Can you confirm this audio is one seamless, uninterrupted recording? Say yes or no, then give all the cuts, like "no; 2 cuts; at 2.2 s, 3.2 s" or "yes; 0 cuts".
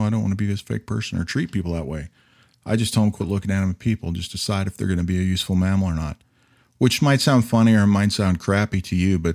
yes; 0 cuts